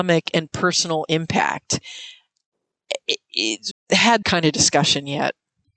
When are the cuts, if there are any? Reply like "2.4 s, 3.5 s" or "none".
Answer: 3.7 s, 4.2 s